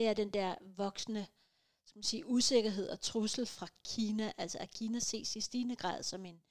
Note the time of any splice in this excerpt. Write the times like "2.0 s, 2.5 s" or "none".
none